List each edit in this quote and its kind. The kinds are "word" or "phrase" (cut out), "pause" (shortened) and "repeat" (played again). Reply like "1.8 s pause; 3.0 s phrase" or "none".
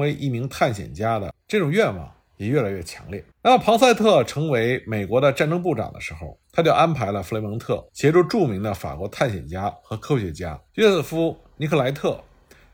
3.3 s pause; 6.4 s pause; 7.9 s pause; 10.7 s pause